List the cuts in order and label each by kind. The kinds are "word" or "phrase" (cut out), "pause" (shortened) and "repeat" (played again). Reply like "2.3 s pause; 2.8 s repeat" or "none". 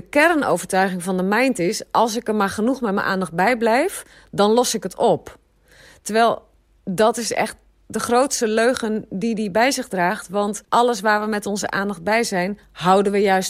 10.6 s pause